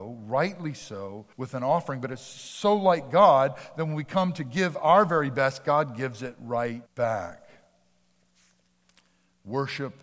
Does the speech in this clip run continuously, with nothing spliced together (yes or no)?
no